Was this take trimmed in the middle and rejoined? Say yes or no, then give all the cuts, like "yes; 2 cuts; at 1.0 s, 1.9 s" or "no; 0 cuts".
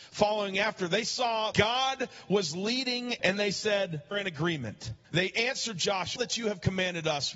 yes; 5 cuts; at 1.5 s, 3.2 s, 4.1 s, 5.0 s, 6.2 s